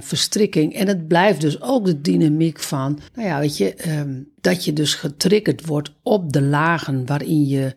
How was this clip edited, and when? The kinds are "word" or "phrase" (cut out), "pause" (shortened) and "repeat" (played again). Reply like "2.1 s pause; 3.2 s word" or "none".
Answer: 3.1 s pause; 4.4 s pause